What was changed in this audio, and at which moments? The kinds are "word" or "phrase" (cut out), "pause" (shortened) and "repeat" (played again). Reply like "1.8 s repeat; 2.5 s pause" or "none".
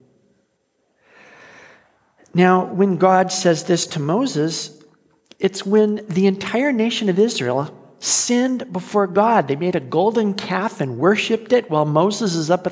none